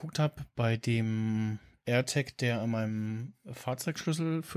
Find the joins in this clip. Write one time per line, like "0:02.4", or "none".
none